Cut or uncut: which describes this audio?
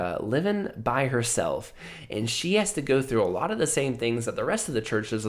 uncut